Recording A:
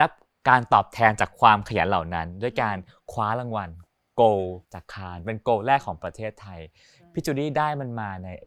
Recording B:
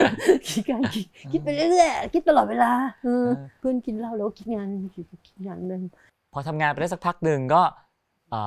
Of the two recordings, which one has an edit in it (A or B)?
A